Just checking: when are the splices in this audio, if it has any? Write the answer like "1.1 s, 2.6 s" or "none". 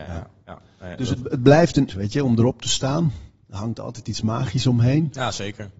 1.9 s